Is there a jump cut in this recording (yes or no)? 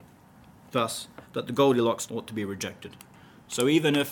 yes